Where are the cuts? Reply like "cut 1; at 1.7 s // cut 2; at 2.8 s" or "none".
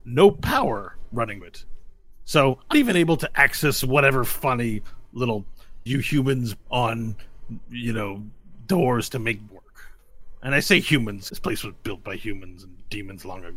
cut 1; at 1.4 s // cut 2; at 2.7 s // cut 3; at 5.9 s // cut 4; at 6.6 s // cut 5; at 9.5 s // cut 6; at 11.3 s